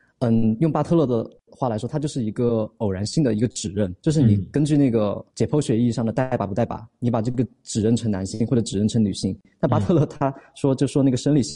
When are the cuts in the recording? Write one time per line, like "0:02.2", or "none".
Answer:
0:04.0
0:05.3